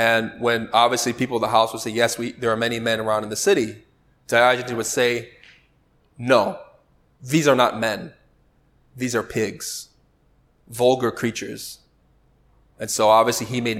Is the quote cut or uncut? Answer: uncut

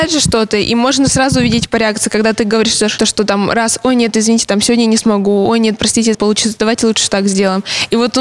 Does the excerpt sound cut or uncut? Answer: cut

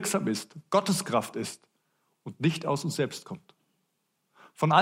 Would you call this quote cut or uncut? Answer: uncut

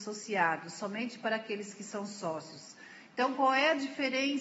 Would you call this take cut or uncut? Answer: uncut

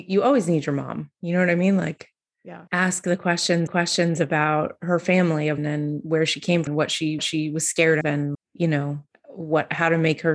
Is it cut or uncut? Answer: cut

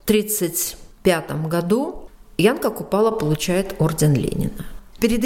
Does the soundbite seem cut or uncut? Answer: uncut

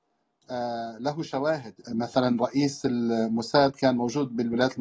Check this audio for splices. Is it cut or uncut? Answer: cut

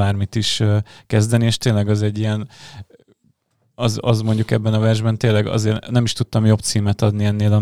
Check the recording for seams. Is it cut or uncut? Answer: uncut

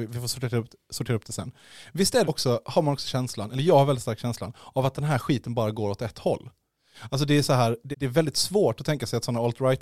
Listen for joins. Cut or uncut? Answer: cut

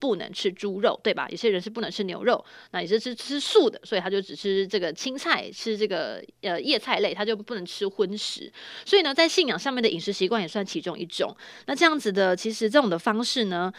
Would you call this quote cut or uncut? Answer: uncut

